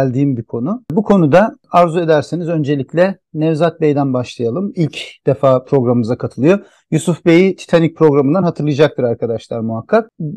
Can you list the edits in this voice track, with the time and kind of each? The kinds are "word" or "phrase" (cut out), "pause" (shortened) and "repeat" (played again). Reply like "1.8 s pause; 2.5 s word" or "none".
none